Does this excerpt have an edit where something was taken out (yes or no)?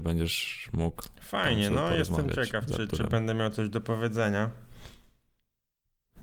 no